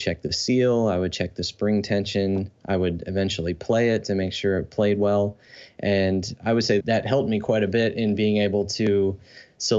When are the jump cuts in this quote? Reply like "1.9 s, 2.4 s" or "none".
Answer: 6.8 s